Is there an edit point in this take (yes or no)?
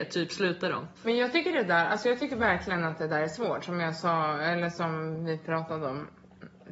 yes